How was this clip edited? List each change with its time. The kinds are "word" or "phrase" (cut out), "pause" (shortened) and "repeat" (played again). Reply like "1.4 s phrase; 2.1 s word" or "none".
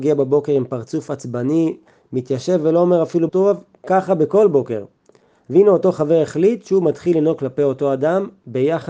3.3 s word

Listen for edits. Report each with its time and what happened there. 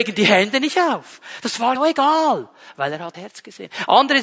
1.8 s phrase; 3.1 s word

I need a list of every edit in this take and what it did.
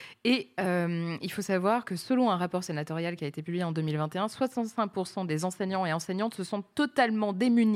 none

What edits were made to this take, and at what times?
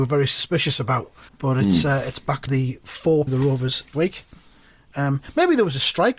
1.3 s pause; 2.5 s word; 3.3 s phrase; 3.9 s word

